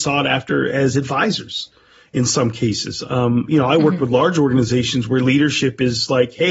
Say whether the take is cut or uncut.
uncut